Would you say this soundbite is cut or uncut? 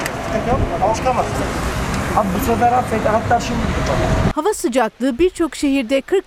cut